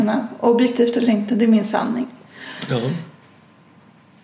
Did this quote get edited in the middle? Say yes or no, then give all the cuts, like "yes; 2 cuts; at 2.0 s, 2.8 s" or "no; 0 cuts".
no; 0 cuts